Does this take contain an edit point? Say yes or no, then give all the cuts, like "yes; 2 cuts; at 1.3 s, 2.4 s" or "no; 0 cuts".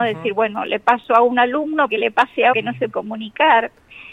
yes; 3 cuts; at 1.9 s, 2.5 s, 2.9 s